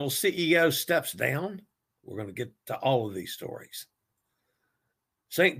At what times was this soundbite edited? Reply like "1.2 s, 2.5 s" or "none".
none